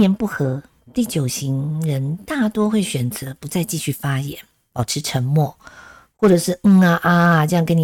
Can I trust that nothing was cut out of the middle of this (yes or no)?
yes